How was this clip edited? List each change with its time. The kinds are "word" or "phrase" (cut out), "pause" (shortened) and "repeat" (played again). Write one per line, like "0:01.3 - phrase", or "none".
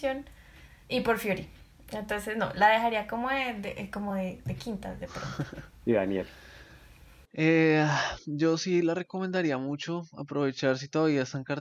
none